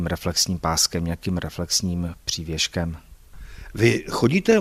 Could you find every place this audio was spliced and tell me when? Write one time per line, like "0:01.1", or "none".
none